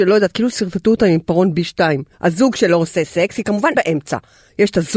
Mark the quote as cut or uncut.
cut